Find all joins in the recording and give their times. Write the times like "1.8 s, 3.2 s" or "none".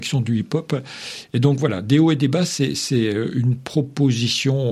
none